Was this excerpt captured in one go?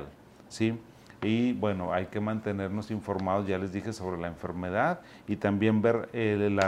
yes; 0 cuts

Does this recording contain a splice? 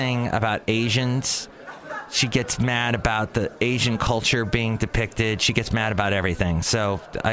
no; 0 cuts

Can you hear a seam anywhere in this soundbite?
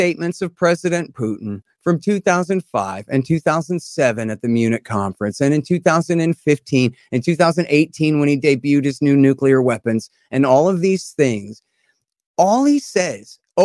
no; 0 cuts

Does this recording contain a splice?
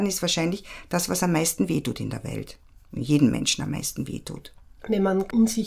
no; 0 cuts

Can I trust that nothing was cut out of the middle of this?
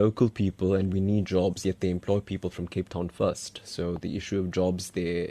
yes; 0 cuts

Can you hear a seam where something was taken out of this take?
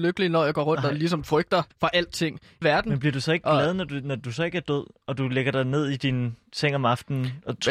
yes; 2 cuts; at 1.7 s, 2.6 s

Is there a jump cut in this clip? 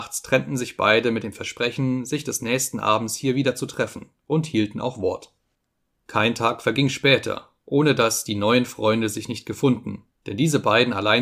no; 0 cuts

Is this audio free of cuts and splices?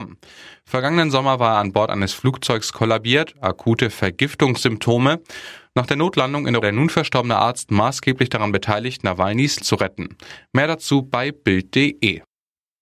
no; 2 cuts; at 6.6 s, 9.6 s

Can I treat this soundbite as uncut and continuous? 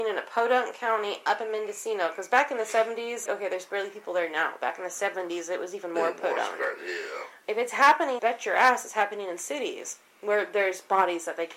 no; 2 cuts; at 3.3 s, 8.2 s

